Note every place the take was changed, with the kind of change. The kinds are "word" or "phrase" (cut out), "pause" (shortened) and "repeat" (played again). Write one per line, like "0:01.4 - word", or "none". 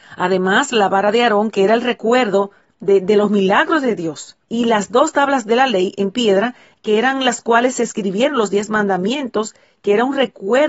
0:04.4 - pause

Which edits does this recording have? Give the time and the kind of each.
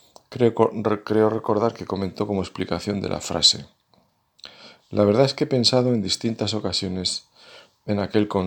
none

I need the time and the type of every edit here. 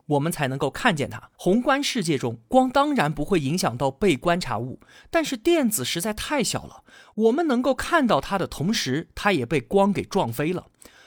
0:01.3 - pause

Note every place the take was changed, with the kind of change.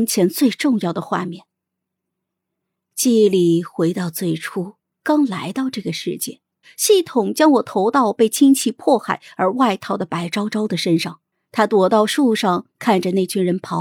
0:04.8 - pause
0:06.6 - pause
0:11.3 - pause

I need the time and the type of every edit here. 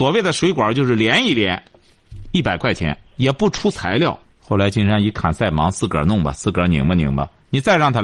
0:03.1 - pause
0:04.2 - pause

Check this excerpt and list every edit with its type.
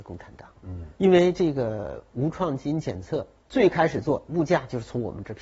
0:01.0 - pause

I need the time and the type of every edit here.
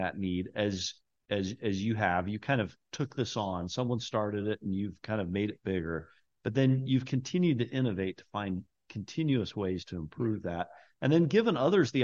none

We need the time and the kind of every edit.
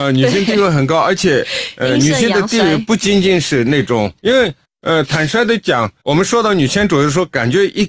0:04.2 - pause
0:06.0 - pause

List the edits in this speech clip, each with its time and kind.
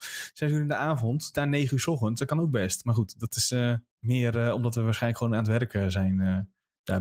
0:01.3 - phrase

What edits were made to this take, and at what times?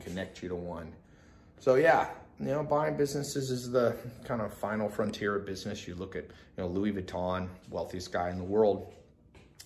none

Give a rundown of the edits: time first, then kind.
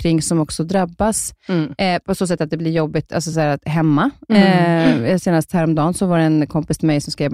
none

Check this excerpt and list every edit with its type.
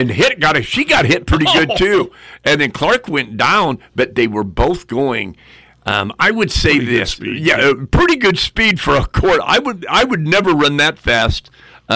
none

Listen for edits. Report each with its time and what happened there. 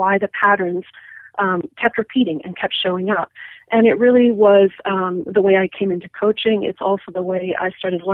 none

